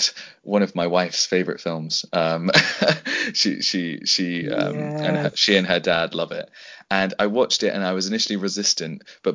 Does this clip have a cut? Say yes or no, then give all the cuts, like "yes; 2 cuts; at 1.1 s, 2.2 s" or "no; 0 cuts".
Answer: no; 0 cuts